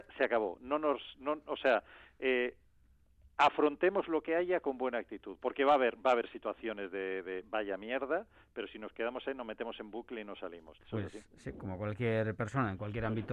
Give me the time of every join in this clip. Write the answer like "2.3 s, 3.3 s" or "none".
none